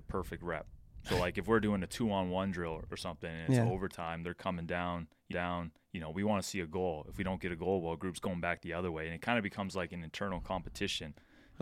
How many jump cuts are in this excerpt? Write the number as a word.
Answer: one